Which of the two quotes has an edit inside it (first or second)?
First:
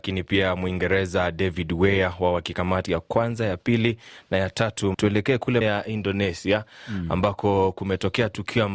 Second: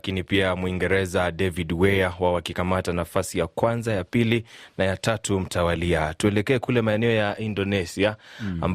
first